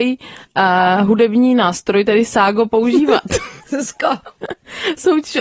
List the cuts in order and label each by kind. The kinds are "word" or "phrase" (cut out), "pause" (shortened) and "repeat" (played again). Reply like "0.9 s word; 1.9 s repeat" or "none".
3.6 s pause